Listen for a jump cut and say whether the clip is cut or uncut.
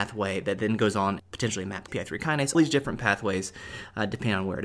cut